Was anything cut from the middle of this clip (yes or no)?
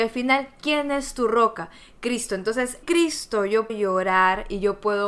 yes